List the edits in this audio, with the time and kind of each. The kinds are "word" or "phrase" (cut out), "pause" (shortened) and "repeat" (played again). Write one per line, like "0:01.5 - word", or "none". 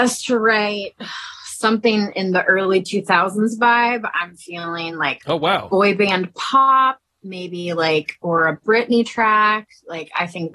none